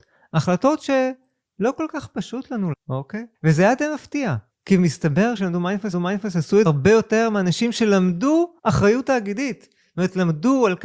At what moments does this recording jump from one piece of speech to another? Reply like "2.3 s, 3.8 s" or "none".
2.7 s, 3.3 s, 4.5 s, 5.4 s, 5.9 s, 6.7 s, 8.6 s